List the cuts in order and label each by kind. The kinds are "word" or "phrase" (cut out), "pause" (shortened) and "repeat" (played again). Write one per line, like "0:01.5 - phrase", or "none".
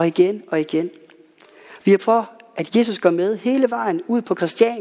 0:02.0 - word
0:02.7 - word

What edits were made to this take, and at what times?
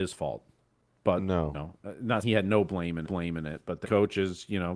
0:01.5 - word
0:02.2 - word
0:03.1 - repeat
0:03.8 - word

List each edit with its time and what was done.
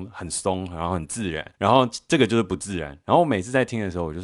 0:01.5 - pause

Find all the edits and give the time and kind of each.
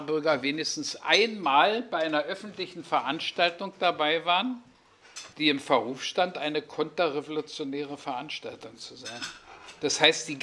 0:05.3 - pause

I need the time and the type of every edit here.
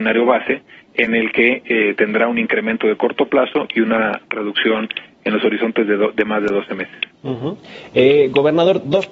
none

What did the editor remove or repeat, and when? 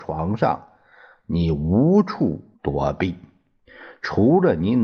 0:02.6 - pause

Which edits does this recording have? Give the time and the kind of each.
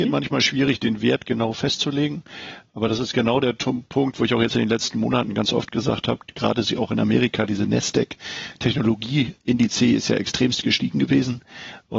0:09.4 - word

